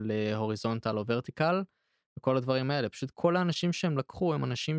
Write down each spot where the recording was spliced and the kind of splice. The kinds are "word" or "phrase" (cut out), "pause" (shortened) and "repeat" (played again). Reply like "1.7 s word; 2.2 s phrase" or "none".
3.1 s word